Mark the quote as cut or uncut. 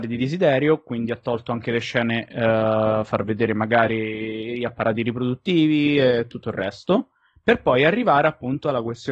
uncut